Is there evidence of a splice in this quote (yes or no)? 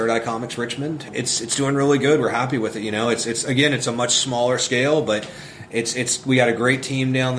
no